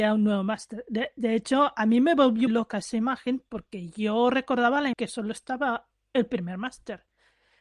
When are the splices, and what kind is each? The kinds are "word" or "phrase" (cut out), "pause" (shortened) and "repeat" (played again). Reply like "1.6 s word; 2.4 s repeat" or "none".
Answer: 2.5 s word; 4.9 s word

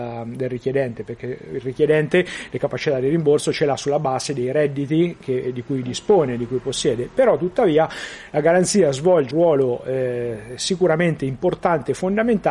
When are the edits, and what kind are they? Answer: 9.3 s word

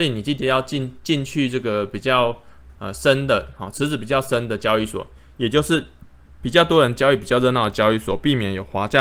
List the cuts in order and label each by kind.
2.8 s pause

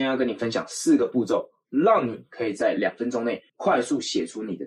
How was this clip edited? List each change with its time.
3.5 s pause

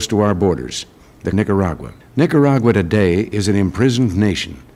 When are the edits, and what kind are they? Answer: 1.3 s phrase; 2.0 s pause

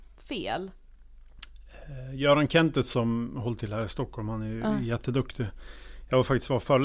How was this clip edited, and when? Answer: none

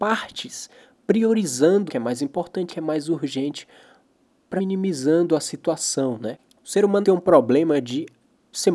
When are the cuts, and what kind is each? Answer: 1.9 s word; 2.7 s word; 4.6 s word; 7.0 s word

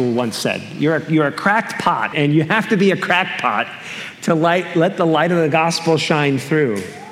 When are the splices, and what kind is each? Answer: 2.1 s word

